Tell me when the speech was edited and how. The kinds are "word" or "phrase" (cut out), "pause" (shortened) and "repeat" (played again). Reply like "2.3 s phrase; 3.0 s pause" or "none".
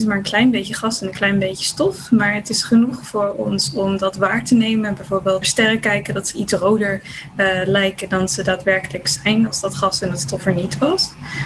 5.4 s phrase